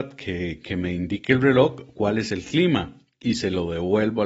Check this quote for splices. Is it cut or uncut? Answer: uncut